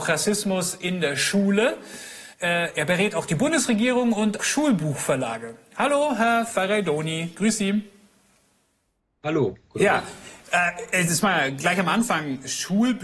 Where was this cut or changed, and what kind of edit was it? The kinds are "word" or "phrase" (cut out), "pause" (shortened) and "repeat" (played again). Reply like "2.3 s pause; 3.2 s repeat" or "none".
2.3 s pause; 4.4 s word